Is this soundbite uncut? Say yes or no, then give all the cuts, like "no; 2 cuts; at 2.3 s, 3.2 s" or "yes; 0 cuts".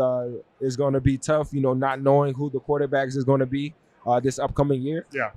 yes; 0 cuts